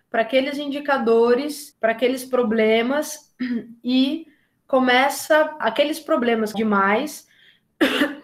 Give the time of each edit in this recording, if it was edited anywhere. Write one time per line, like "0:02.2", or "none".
0:01.7
0:05.6
0:06.5